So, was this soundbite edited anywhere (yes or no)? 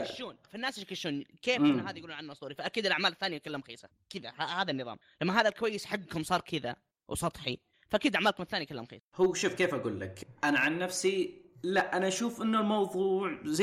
no